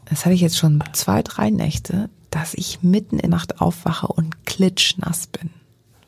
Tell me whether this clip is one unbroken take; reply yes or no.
no